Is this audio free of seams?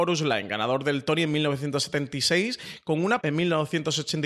no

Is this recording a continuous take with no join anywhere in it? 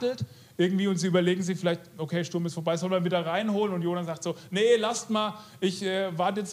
yes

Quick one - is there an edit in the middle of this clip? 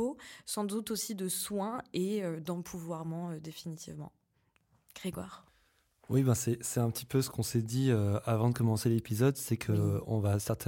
yes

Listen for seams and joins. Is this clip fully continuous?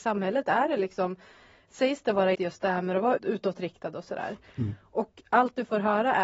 no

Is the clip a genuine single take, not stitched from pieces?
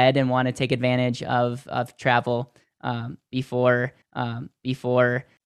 no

